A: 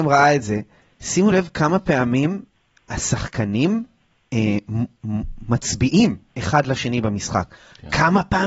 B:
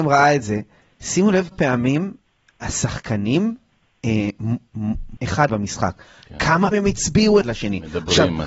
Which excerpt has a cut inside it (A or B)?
B